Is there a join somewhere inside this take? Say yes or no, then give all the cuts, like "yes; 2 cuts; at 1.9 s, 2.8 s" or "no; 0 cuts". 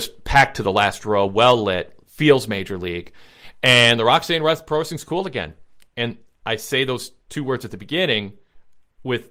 no; 0 cuts